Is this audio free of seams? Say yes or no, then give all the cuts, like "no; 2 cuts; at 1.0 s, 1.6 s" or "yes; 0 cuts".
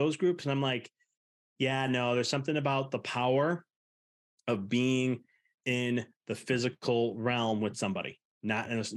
yes; 0 cuts